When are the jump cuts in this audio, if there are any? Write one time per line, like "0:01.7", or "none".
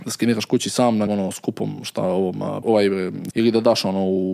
0:01.1
0:02.6
0:03.3